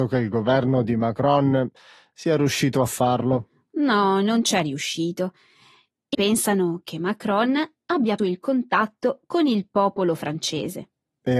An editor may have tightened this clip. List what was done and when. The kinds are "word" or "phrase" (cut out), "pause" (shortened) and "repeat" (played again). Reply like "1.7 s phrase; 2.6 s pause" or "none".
6.1 s word; 8.2 s word